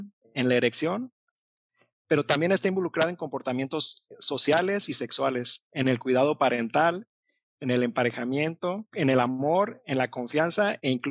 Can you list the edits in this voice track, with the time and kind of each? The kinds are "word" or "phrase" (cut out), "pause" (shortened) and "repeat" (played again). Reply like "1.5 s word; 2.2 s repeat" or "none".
none